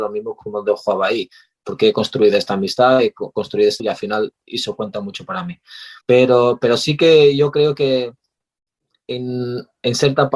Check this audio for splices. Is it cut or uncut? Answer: cut